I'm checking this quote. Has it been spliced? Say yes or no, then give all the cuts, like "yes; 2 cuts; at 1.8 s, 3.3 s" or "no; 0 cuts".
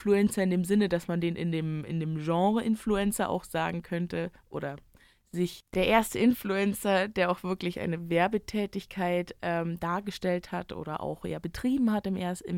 no; 0 cuts